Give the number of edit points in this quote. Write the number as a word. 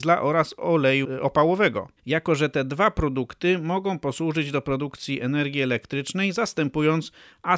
one